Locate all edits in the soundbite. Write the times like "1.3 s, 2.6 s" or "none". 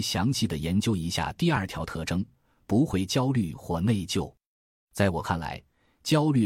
none